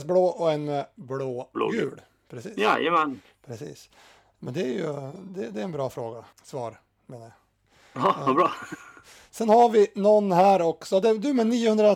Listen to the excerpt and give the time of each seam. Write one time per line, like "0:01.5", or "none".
0:06.3